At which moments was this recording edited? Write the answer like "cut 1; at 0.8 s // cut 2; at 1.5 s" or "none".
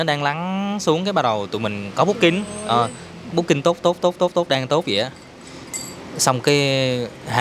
none